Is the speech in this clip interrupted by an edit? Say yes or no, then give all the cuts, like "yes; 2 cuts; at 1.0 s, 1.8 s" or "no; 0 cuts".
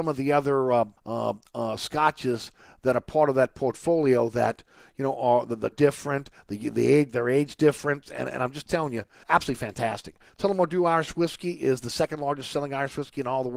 yes; 3 cuts; at 1.0 s, 5.7 s, 9.2 s